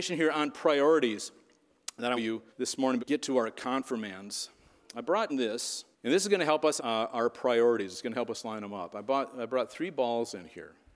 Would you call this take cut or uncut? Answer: cut